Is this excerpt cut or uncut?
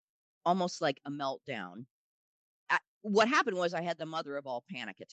uncut